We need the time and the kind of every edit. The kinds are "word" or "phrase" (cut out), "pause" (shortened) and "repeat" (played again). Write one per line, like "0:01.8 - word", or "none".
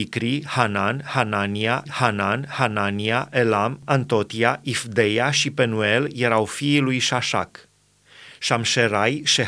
0:01.9 - repeat